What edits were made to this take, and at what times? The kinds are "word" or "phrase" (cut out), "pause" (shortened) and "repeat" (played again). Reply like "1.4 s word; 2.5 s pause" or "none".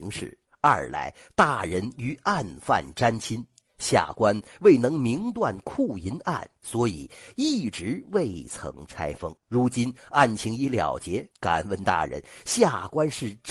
9.4 s pause; 11.3 s pause